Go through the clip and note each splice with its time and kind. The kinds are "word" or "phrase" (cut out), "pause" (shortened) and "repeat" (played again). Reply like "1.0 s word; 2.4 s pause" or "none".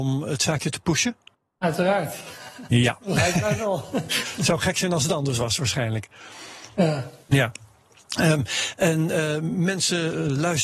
1.3 s pause; 7.2 s pause